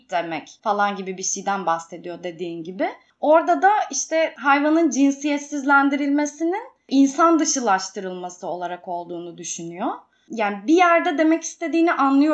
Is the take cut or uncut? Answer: uncut